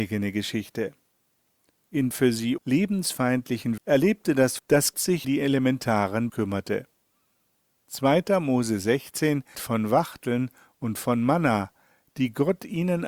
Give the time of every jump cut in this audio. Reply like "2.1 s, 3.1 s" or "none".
2.1 s, 2.6 s, 3.8 s, 4.6 s, 4.9 s, 5.2 s, 6.3 s, 9.5 s

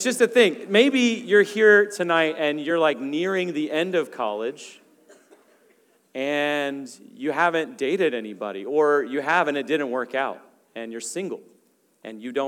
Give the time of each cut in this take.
none

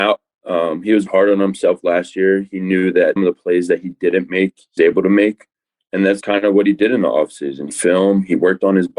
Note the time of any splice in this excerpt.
1.1 s, 3.2 s, 4.8 s, 6.2 s, 7.7 s

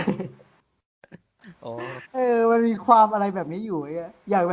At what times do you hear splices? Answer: 2.0 s

